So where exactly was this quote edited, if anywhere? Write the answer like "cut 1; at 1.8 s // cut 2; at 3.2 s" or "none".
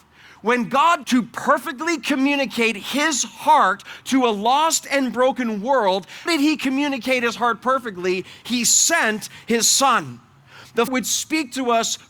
cut 1; at 1.0 s // cut 2; at 6.3 s // cut 3; at 10.9 s

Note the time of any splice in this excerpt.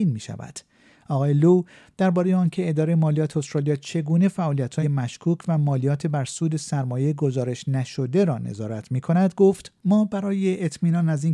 cut 1; at 4.8 s

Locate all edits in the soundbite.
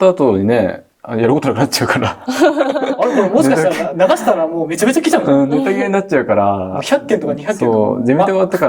cut 1; at 0.9 s

